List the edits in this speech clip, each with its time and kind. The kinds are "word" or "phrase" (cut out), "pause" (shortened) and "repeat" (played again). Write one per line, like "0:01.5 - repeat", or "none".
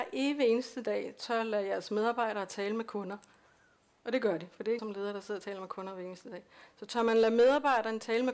0:04.8 - word